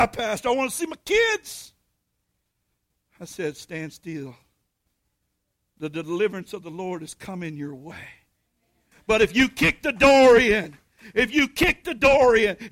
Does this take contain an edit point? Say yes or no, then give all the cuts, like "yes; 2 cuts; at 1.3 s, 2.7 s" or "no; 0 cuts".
no; 0 cuts